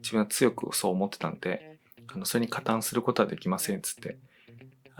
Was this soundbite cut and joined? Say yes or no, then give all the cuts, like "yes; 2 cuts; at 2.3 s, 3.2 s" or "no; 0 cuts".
no; 0 cuts